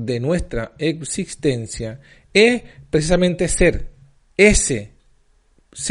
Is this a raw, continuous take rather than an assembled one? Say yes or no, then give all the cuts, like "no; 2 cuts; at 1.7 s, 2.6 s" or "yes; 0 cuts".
yes; 0 cuts